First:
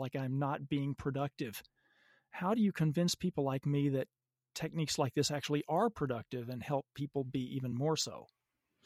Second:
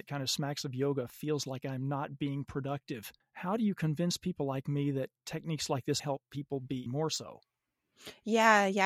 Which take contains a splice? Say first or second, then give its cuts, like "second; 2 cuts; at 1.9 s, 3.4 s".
second; 4 cuts; at 3.2 s, 5.2 s, 6.0 s, 6.9 s